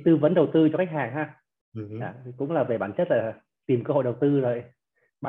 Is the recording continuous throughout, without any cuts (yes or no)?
yes